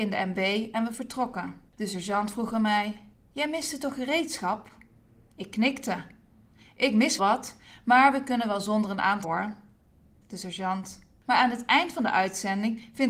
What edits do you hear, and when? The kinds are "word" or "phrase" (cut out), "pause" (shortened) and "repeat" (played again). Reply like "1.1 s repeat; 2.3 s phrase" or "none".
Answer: 1.7 s pause; 7.2 s word; 9.2 s word

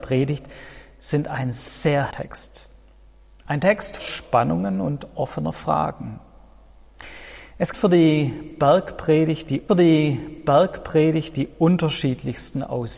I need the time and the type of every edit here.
2.1 s word; 4.0 s word; 7.7 s word; 9.7 s repeat

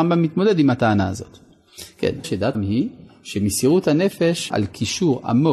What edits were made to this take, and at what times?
2.2 s word; 2.5 s word; 4.5 s word

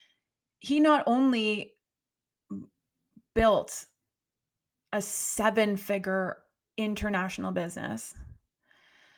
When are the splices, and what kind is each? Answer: none

